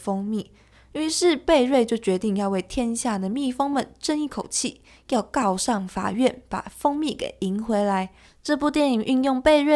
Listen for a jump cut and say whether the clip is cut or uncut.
uncut